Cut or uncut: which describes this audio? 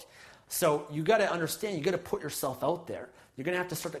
uncut